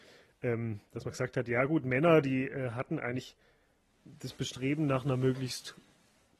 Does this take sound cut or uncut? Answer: uncut